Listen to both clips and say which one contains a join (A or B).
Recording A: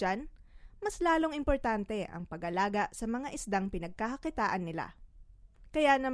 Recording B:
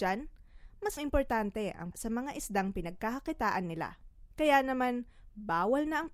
B